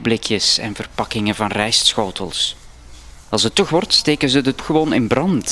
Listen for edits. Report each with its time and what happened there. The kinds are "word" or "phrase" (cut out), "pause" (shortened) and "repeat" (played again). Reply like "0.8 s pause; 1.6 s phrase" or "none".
3.7 s word; 4.6 s word